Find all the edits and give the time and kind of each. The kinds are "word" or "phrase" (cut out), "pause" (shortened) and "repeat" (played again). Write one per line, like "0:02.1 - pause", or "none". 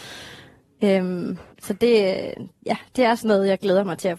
0:01.5 - pause

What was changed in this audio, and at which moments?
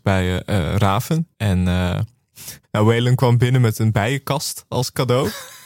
0:01.3 - pause
0:02.6 - pause

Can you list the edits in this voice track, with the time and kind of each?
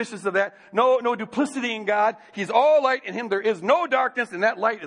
none

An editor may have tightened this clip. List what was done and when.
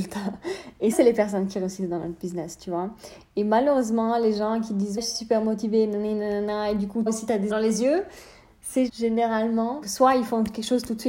0:00.9 - word
0:05.0 - word
0:07.1 - word
0:07.5 - word
0:08.9 - word
0:09.8 - word

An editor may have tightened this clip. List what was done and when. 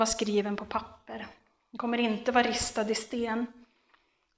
none

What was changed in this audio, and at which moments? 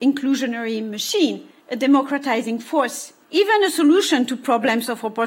0:01.6 - pause
0:03.2 - pause

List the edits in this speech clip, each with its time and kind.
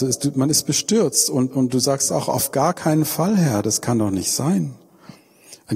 0:01.5 - word

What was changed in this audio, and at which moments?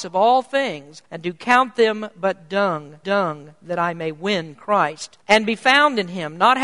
0:01.1 - pause
0:03.0 - repeat
0:05.2 - pause

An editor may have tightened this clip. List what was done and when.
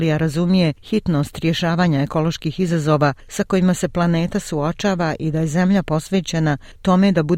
none

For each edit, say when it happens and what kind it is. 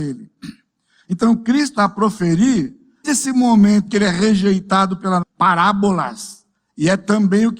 0:01.8 - word
0:03.0 - word
0:03.9 - word
0:05.2 - word

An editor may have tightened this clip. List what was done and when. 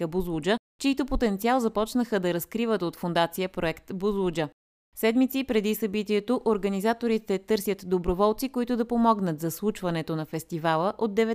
none

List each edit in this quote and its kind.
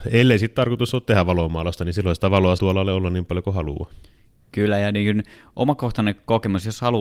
0:02.6 - word

